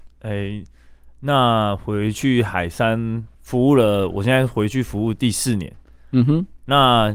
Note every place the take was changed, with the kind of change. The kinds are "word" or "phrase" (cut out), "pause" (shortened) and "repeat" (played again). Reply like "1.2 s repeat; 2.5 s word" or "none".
3.3 s pause

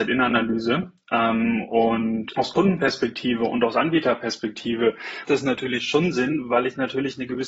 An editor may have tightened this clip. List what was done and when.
2.3 s word; 5.2 s word

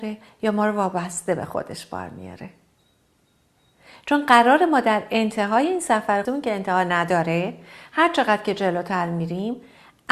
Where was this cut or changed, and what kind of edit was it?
6.2 s word

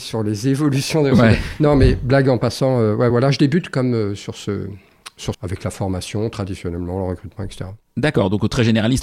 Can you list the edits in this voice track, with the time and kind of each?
3.1 s word; 5.3 s phrase

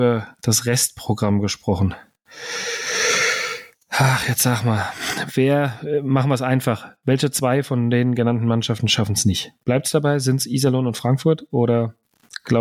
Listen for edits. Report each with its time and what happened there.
none

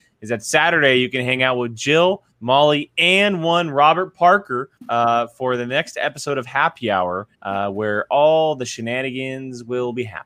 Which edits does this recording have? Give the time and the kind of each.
2.3 s pause; 4.8 s pause; 7.3 s pause

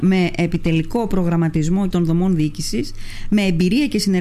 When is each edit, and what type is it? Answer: 1.9 s word

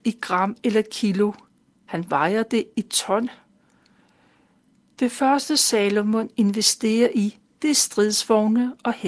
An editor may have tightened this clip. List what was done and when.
none

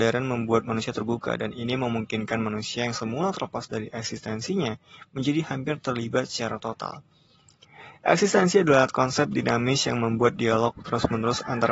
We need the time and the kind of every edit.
none

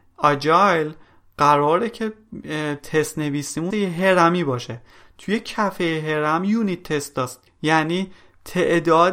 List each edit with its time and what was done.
3.7 s word

